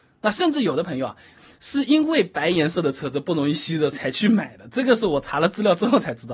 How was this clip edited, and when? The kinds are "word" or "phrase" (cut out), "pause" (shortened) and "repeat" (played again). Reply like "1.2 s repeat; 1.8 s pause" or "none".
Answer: none

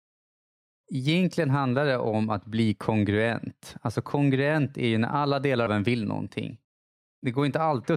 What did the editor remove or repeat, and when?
5.7 s word

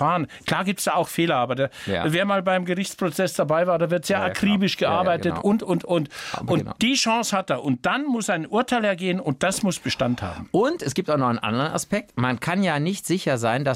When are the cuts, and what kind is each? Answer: none

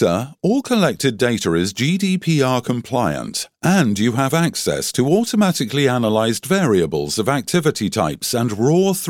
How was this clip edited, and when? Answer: none

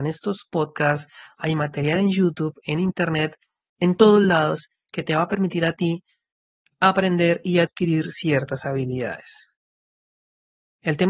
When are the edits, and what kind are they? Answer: none

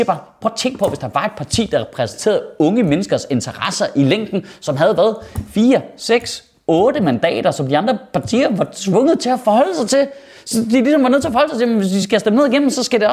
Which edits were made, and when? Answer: none

